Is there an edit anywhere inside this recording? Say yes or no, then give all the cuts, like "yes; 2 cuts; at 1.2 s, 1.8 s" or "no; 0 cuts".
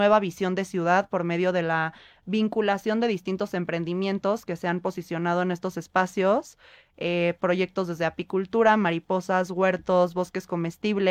no; 0 cuts